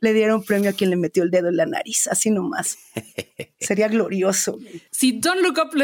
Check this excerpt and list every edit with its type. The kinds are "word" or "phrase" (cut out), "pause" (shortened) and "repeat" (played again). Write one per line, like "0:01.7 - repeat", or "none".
0:04.9 - pause